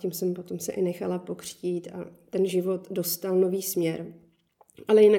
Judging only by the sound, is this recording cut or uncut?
uncut